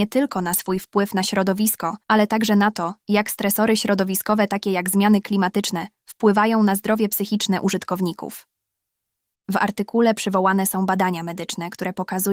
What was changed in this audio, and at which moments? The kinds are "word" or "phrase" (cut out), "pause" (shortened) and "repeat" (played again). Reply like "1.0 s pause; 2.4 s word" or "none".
2.0 s pause